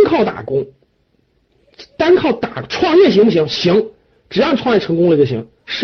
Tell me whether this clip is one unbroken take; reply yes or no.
yes